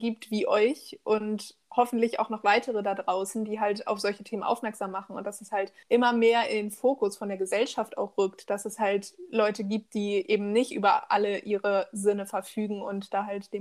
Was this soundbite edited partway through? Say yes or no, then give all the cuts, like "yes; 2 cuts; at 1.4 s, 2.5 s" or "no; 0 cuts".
yes; 1 cut; at 5.8 s